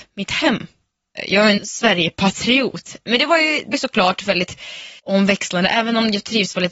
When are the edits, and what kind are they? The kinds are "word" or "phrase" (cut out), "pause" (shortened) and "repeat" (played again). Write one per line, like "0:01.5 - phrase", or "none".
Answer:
0:01.6 - word
0:03.7 - word
0:05.0 - pause